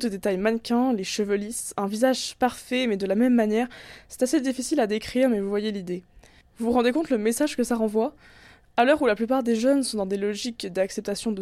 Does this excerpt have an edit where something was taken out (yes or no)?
no